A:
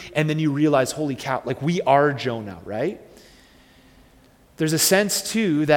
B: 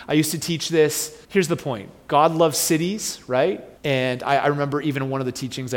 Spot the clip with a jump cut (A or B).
B